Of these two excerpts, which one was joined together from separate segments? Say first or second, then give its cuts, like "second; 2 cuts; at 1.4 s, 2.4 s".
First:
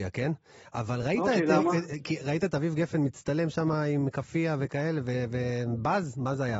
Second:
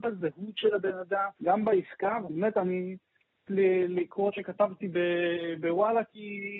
second; 3 cuts; at 1.4 s, 3.5 s, 4.3 s